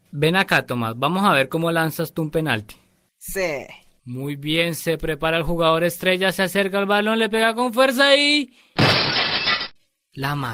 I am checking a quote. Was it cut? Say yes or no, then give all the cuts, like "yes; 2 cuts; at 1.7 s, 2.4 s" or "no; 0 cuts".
no; 0 cuts